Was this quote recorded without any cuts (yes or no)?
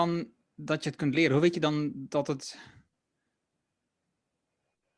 yes